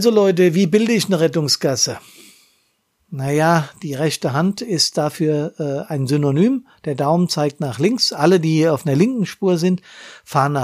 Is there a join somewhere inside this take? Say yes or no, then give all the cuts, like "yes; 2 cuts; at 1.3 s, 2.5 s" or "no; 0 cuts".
no; 0 cuts